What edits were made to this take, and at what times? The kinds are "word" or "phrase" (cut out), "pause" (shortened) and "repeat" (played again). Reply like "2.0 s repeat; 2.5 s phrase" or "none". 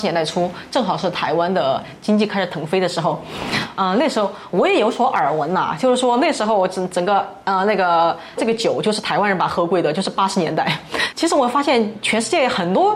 8.4 s word

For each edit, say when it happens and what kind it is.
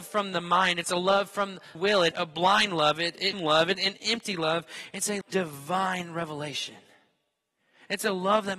1.7 s word; 2.1 s word; 3.3 s phrase; 3.7 s word; 5.2 s phrase

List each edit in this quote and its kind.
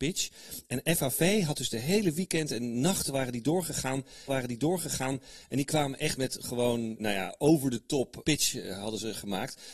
4.3 s repeat; 7.0 s word; 8.2 s word

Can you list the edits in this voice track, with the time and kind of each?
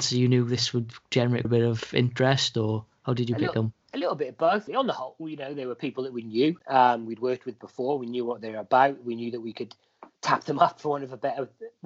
1.4 s word; 3.8 s pause; 4.7 s word; 6.6 s pause; 10.1 s pause

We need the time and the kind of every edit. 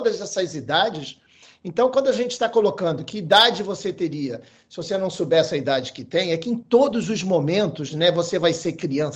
none

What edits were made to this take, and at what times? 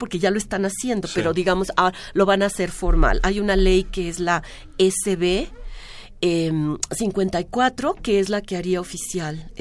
none

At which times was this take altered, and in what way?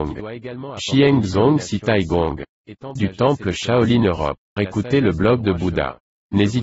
3.0 s word; 4.5 s pause

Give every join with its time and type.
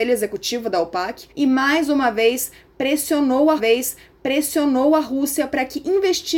1.3 s pause; 3.6 s repeat

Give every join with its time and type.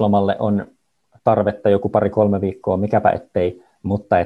none

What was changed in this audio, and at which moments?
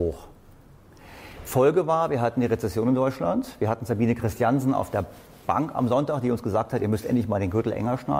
none

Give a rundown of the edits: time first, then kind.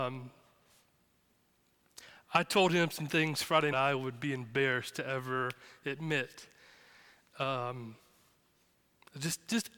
3.7 s word

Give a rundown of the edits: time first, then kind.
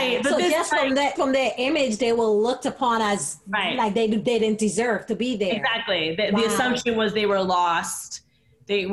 1.2 s word

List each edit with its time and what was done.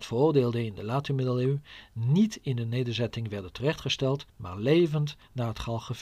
4.3 s pause

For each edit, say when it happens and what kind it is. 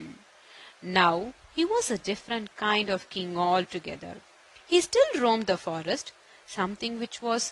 none

